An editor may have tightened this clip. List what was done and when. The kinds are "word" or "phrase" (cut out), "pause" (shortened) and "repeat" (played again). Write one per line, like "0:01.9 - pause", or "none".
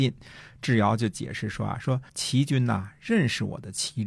0:02.1 - pause